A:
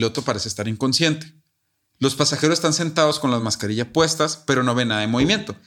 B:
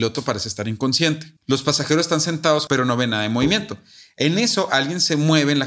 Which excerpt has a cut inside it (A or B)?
B